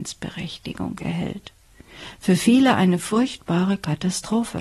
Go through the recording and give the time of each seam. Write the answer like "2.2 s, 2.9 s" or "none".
none